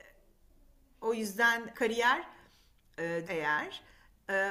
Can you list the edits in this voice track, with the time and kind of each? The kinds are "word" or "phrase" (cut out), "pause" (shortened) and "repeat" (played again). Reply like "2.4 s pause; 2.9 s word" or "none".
1.7 s word; 3.2 s word

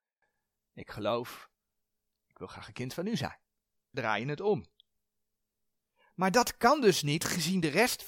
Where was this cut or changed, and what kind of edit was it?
3.9 s word

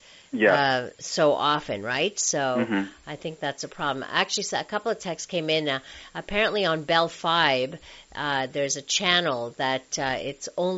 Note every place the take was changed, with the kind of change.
none

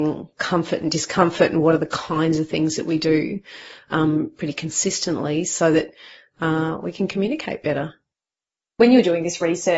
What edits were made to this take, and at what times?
none

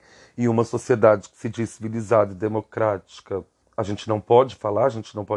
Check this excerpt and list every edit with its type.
3.6 s pause

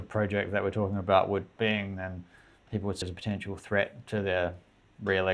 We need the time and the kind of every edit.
1.6 s phrase; 3.0 s word

